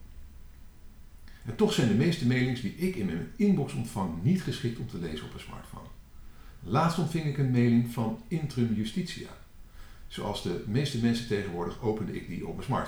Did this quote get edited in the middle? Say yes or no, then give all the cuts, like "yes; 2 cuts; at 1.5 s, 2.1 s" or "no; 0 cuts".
no; 0 cuts